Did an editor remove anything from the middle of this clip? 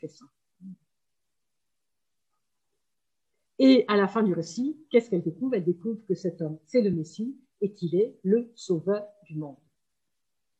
no; 0 cuts

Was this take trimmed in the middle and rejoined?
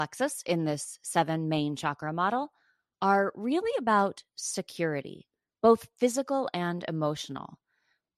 no; 0 cuts

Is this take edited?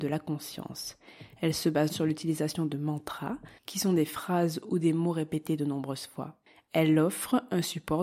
yes; 1 cut; at 1.9 s

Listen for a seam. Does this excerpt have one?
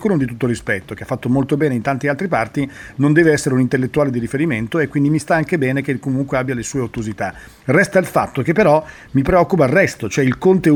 no; 0 cuts

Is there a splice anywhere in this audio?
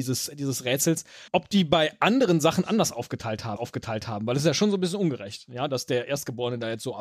yes; 2 cuts; at 1.3 s, 3.6 s

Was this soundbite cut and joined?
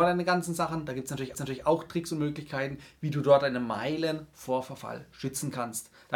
yes; 1 cut; at 1.3 s

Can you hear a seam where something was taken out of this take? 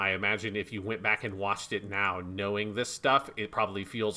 no; 0 cuts

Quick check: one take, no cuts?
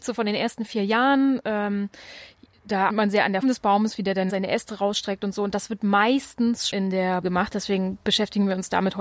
no; 5 cuts; at 2.9 s, 3.4 s, 4.3 s, 6.7 s, 7.2 s

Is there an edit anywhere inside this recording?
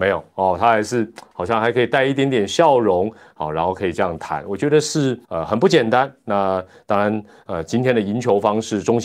yes; 1 cut; at 5.2 s

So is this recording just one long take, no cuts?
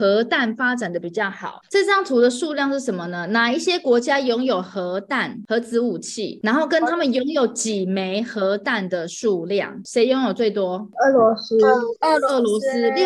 yes; 0 cuts

